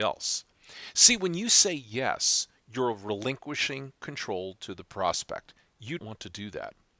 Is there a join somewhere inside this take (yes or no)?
yes